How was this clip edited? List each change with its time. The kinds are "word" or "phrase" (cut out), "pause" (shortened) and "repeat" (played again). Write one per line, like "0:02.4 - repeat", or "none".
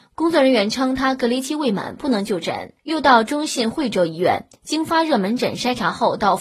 none